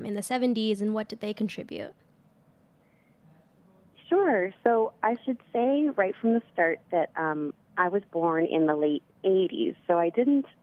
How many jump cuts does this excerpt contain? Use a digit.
0